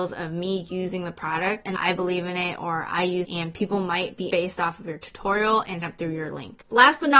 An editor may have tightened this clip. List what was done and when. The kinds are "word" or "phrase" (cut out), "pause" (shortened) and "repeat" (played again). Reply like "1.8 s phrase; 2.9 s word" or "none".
1.8 s phrase; 3.2 s word; 4.3 s word; 5.8 s word